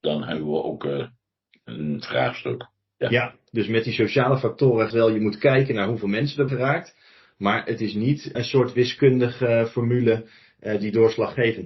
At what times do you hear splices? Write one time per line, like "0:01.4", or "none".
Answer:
0:04.9
0:06.5
0:08.3